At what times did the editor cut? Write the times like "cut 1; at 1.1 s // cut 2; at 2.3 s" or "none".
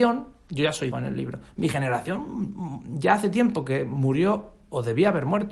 cut 1; at 0.9 s

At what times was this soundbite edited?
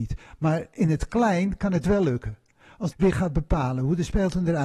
cut 1; at 2.9 s

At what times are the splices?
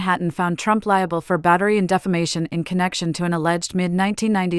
none

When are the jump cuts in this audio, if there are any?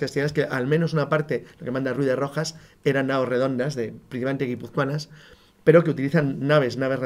none

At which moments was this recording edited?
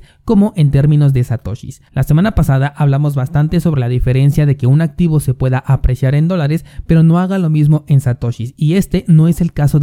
cut 1; at 1.9 s

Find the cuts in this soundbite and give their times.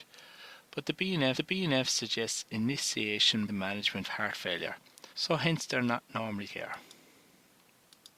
cut 1; at 1.3 s // cut 2; at 3.5 s // cut 3; at 4.0 s // cut 4; at 5.1 s // cut 5; at 6.4 s

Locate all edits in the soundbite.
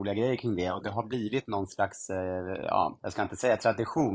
none

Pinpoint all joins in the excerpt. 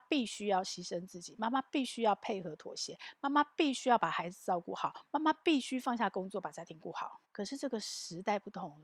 cut 1; at 7.2 s

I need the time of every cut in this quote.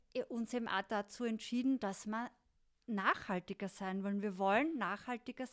none

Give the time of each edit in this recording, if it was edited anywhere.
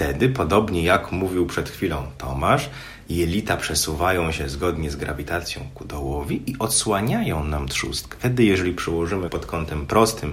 cut 1; at 9.3 s

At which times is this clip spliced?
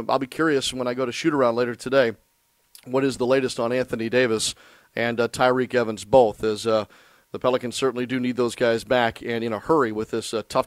none

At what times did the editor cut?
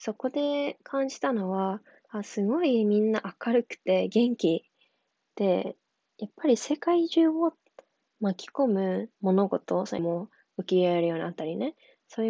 cut 1; at 9.1 s // cut 2; at 10.0 s

